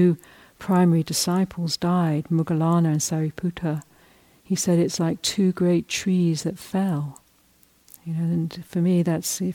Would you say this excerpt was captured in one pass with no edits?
yes; 0 cuts

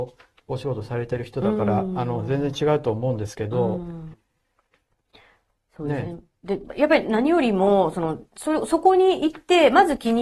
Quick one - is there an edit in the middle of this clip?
yes; 1 cut; at 4.1 s

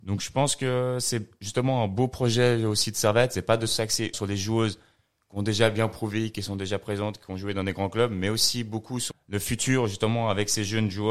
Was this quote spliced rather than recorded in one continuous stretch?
yes; 2 cuts; at 4.1 s, 9.1 s

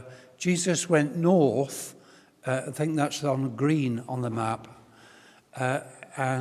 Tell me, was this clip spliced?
no; 0 cuts

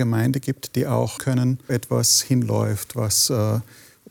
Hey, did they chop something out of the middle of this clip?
yes; 2 cuts; at 1.2 s, 1.7 s

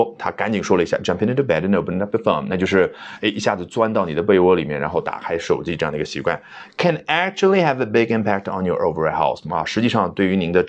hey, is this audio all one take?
yes; 0 cuts

